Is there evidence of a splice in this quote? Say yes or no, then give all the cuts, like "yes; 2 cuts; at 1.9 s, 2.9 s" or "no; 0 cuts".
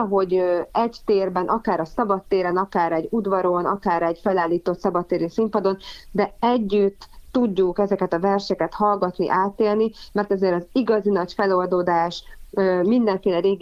no; 0 cuts